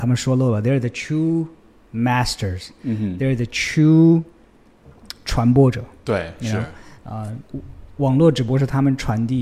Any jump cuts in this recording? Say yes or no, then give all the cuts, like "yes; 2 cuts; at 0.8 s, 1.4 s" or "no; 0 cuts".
no; 0 cuts